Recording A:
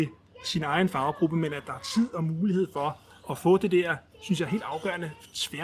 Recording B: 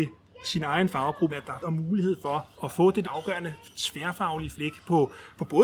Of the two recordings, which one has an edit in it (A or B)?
B